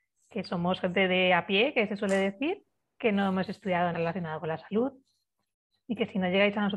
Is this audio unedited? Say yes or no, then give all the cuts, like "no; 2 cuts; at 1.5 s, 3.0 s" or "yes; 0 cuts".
no; 1 cut; at 3.9 s